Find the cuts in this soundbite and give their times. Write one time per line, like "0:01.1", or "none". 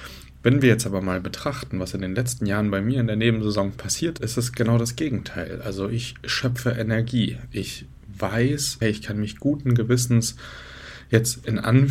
0:04.2
0:08.8